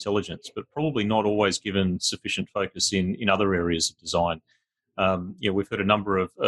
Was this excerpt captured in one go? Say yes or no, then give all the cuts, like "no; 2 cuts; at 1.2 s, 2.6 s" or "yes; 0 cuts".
yes; 0 cuts